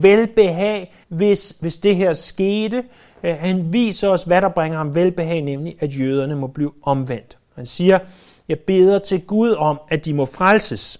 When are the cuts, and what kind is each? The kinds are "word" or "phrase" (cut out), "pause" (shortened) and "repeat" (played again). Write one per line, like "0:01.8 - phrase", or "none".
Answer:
0:01.0 - pause